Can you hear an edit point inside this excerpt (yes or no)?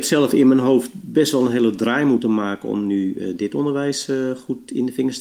no